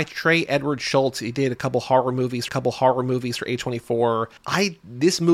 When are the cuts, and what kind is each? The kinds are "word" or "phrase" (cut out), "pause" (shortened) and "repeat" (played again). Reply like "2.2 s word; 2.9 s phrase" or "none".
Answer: 2.5 s repeat; 4.4 s pause